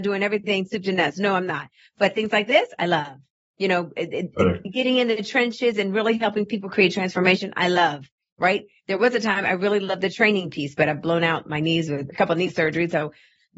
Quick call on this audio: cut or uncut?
uncut